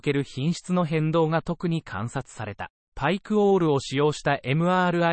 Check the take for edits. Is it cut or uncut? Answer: cut